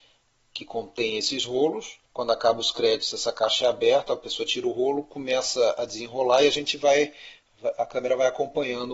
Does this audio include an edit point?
yes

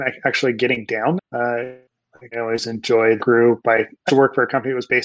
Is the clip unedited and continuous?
no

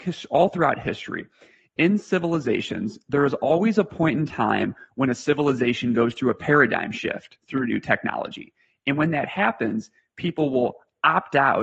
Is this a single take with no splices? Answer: yes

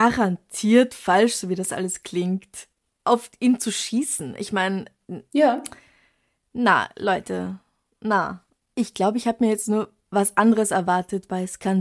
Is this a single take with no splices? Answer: yes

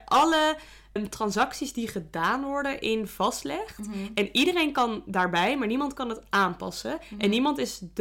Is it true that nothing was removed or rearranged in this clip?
no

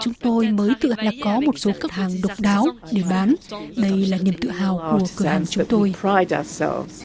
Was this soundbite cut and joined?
yes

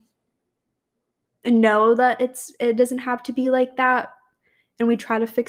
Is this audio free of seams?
yes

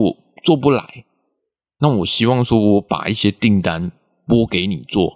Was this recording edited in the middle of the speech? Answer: no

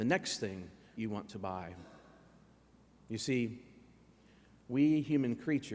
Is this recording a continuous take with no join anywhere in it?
no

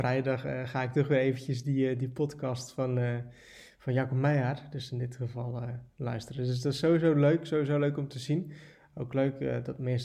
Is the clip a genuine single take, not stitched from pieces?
yes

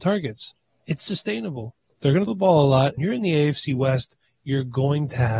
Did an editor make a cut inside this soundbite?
yes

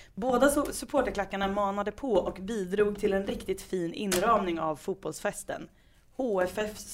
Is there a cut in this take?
no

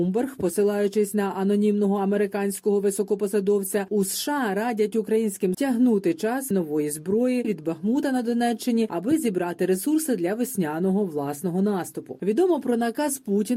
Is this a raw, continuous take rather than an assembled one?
no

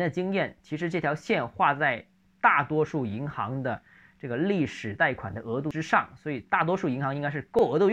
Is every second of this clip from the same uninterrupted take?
yes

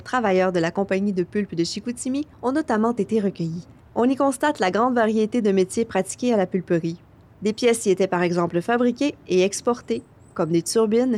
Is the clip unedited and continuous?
no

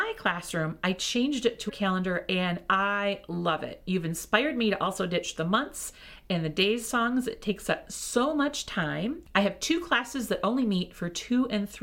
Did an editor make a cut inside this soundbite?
yes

